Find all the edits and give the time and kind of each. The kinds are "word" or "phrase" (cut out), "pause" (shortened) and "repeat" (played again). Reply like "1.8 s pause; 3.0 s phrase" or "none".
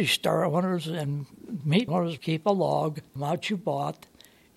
1.9 s word; 2.2 s word; 3.2 s word